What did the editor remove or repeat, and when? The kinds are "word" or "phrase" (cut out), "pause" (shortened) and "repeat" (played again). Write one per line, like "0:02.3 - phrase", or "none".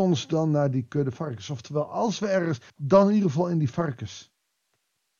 0:02.7 - pause